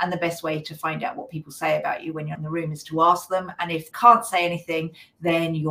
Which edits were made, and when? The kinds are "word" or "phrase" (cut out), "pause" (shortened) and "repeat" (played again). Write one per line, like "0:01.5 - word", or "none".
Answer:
0:02.3 - word
0:03.9 - word

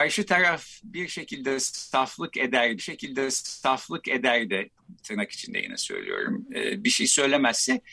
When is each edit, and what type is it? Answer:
0:02.8 - repeat

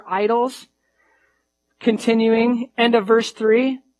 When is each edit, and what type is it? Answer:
0:02.7 - word

